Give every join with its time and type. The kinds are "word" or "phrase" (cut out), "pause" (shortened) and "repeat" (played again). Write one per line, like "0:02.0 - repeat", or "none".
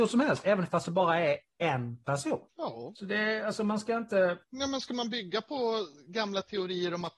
0:04.4 - pause